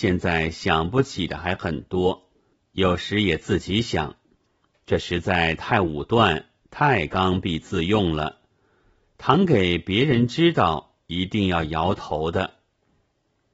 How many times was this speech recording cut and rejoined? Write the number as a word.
one